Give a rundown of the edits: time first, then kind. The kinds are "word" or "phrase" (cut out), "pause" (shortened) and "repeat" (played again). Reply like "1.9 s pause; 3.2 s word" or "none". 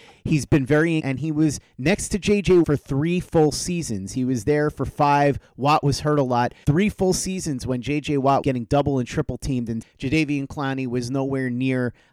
1.0 s word; 2.6 s word; 6.6 s word; 8.4 s word; 9.8 s word